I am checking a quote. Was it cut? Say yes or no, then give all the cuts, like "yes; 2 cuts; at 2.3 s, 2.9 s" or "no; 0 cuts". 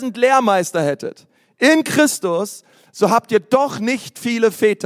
no; 0 cuts